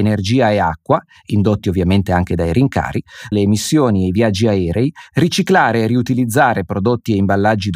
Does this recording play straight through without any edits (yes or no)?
no